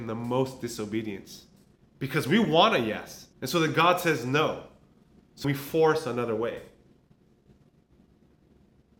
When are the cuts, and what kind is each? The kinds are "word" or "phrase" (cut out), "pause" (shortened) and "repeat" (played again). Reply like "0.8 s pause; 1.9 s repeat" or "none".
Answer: 1.8 s pause; 3.3 s pause; 5.4 s word